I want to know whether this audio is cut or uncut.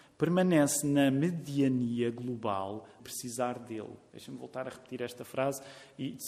cut